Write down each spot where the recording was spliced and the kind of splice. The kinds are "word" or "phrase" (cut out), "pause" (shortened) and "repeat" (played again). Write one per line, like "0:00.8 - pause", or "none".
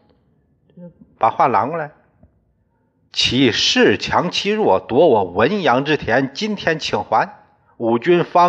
none